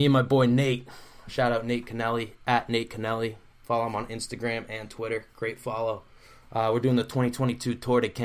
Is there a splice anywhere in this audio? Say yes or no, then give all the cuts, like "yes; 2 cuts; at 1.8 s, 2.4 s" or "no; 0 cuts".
no; 0 cuts